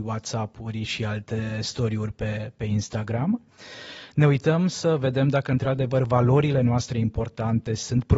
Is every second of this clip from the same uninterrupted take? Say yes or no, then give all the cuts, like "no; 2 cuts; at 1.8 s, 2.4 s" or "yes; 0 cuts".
yes; 0 cuts